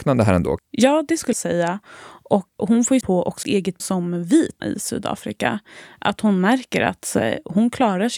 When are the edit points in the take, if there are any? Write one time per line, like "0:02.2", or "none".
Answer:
0:01.3
0:02.6
0:03.0
0:03.4
0:03.8
0:04.6